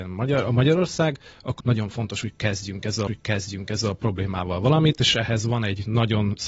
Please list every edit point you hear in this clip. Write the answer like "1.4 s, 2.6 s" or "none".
1.6 s, 3.1 s